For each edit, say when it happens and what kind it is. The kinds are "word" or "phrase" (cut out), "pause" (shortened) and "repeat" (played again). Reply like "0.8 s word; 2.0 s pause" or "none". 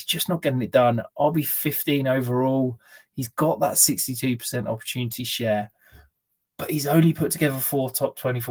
none